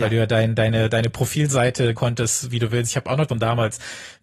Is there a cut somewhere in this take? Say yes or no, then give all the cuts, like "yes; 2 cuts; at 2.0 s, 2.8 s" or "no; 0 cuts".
yes; 2 cuts; at 2.0 s, 3.3 s